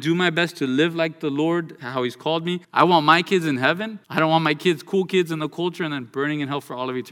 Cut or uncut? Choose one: cut